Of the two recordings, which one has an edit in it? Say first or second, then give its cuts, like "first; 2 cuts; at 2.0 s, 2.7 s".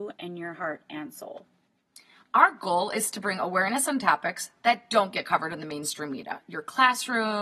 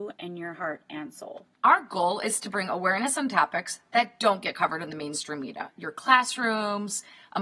second; 1 cut; at 1.5 s